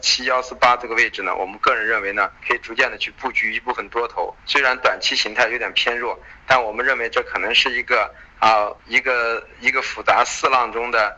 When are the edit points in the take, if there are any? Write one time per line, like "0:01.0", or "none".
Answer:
0:02.4
0:04.4
0:08.8